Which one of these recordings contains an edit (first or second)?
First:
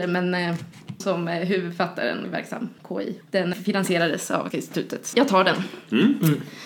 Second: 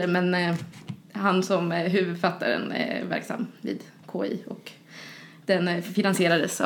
first